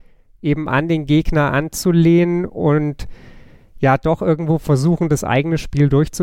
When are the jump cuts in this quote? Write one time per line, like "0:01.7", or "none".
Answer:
none